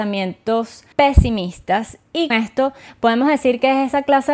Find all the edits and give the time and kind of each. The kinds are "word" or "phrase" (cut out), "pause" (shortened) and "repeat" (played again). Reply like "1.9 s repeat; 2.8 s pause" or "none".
0.9 s pause; 2.3 s word